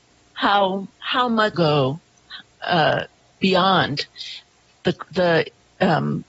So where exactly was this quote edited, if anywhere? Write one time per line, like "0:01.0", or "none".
0:00.9
0:01.5
0:05.1